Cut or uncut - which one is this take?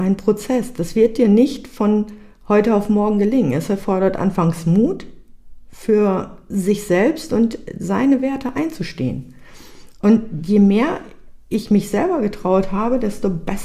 uncut